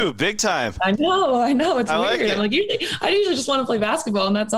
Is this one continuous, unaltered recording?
yes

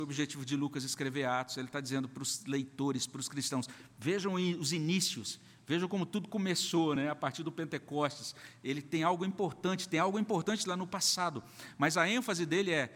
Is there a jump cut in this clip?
no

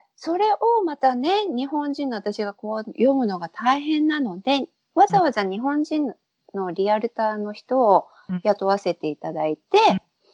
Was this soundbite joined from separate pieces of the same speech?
no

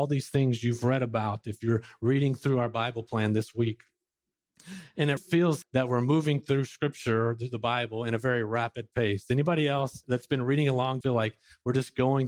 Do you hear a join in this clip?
yes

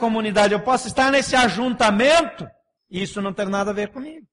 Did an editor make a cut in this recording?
yes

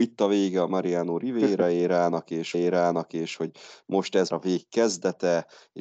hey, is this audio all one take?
no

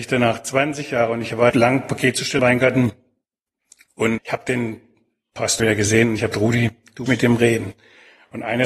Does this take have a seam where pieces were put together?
yes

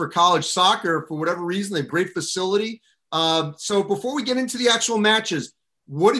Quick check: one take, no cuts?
no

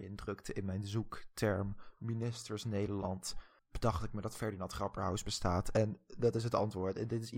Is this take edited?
yes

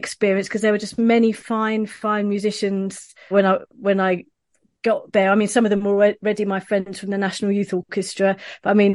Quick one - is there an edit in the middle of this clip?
yes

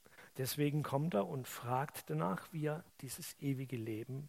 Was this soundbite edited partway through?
no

